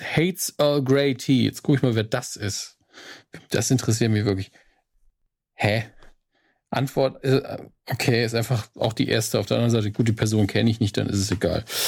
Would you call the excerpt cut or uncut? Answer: uncut